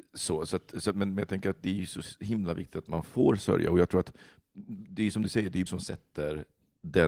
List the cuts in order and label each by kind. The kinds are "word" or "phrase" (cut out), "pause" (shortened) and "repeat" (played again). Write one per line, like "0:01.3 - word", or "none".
0:00.9 - word
0:05.7 - phrase

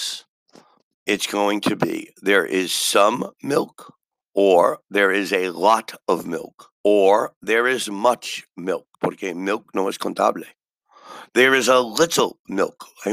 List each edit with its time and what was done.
0:04.1 - pause
0:06.8 - pause
0:08.9 - pause

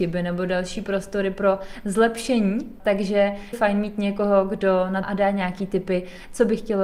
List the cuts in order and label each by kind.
0:02.8 - word
0:03.5 - word
0:05.0 - phrase

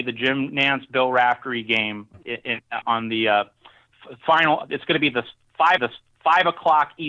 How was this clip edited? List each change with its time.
0:02.1 - word
0:02.8 - word
0:05.8 - repeat

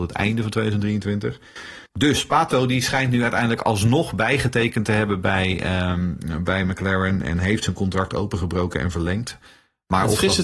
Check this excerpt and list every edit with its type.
0:01.9 - pause

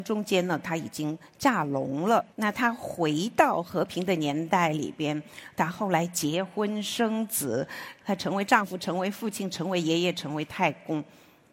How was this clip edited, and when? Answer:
0:02.3 - pause

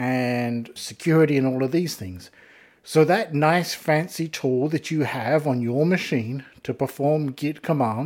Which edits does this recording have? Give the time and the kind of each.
none

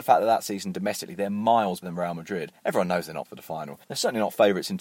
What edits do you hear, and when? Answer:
0:01.8 - word
0:02.6 - pause
0:03.2 - word
0:03.8 - pause

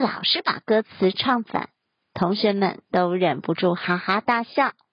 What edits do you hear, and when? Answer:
none

